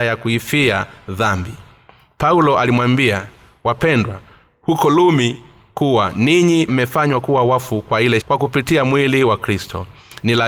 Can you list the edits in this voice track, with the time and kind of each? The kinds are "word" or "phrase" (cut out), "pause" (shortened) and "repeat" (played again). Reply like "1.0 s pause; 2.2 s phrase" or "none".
6.7 s word; 8.2 s word